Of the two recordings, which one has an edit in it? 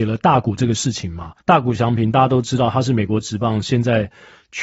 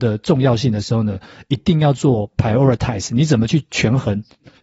first; 1 cut; at 1.4 s

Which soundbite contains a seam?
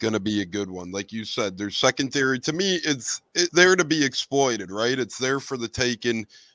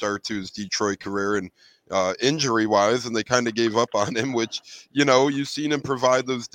first; 1 cut; at 3.5 s

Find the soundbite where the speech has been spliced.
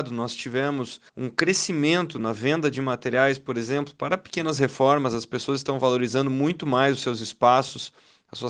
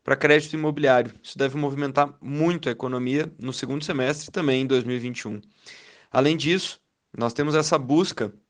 first; 1 cut; at 1.1 s

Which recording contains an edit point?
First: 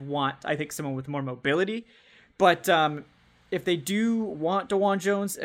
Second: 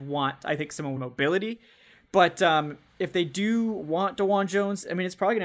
second; 2 cuts; at 1.0 s, 2.9 s

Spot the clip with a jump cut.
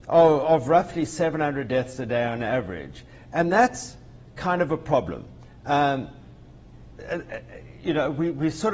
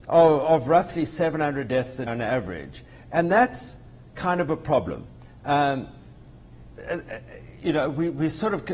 second; 1 cut; at 2.1 s

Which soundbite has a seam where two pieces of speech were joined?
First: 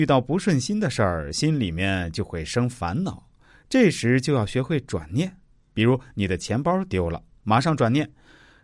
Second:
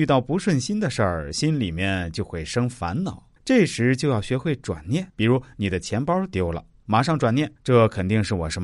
second; 3 cuts; at 3.4 s, 5.1 s, 7.6 s

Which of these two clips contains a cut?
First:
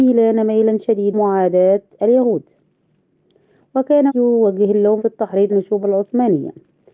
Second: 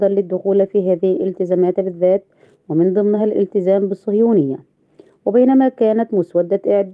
first; 5 cuts; at 1.1 s, 4.1 s, 5.0 s, 5.5 s, 5.8 s

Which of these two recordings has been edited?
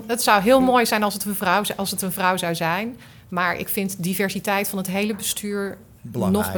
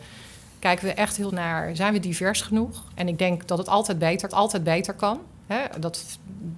second; 2 cuts; at 1.3 s, 4.3 s

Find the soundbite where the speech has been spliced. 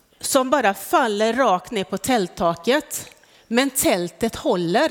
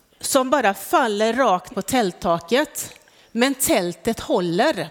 second; 1 cut; at 1.7 s

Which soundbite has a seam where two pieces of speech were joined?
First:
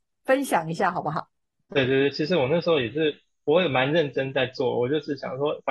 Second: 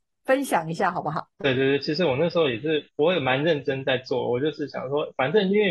second; 2 cuts; at 1.3 s, 2.9 s

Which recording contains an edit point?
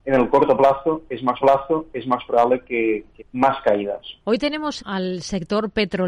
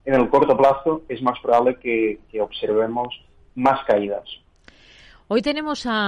first; 4 cuts; at 1.4 s, 3.2 s, 4.2 s, 4.8 s

